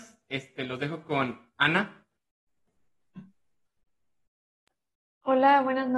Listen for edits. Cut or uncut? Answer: uncut